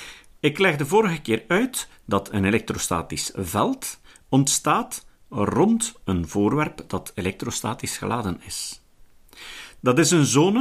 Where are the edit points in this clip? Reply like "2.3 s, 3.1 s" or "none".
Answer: none